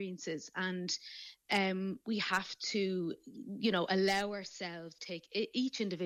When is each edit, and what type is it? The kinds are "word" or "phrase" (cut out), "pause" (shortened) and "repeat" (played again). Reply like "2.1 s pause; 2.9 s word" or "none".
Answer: none